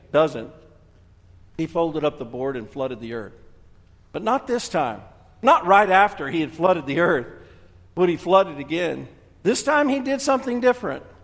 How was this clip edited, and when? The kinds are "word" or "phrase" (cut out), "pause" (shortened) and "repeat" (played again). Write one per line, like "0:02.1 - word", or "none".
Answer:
none